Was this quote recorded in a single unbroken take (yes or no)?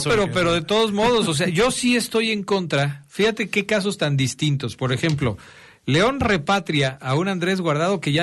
yes